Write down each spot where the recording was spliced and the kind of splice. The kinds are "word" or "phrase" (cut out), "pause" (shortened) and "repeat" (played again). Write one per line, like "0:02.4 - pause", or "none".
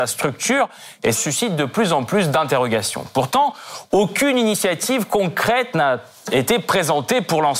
0:01.1 - phrase